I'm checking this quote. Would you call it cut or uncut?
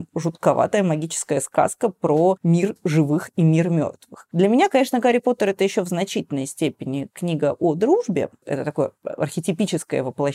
uncut